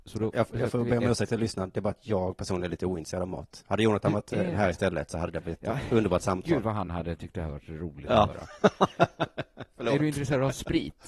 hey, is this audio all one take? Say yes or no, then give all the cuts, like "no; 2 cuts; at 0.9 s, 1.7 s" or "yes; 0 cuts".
yes; 0 cuts